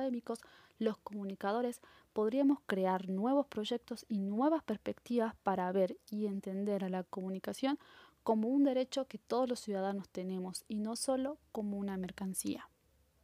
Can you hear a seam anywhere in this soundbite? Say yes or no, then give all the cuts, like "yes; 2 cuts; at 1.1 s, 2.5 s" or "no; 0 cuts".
no; 0 cuts